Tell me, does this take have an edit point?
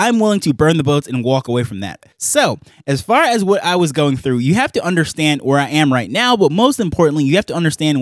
yes; 1 cut; at 2.1 s

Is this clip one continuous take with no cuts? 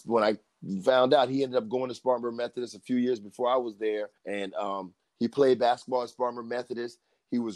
no; 2 cuts; at 4.2 s, 5.0 s

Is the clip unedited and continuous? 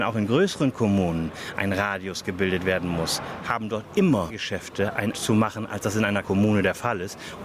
no; 3 cuts; at 4.3 s, 5.1 s, 6.2 s

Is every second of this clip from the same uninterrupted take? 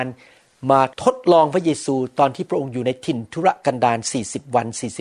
no; 1 cut; at 0.9 s

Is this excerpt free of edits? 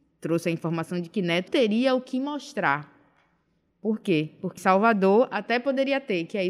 no; 2 cuts; at 1.5 s, 4.6 s

